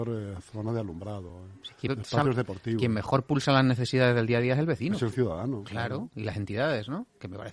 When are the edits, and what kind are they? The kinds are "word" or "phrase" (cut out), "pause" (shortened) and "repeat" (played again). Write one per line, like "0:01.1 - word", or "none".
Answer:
0:01.9 - word